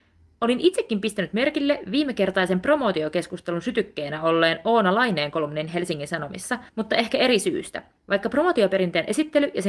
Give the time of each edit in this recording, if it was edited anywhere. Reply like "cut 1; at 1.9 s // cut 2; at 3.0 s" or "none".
cut 1; at 6.7 s // cut 2; at 8.0 s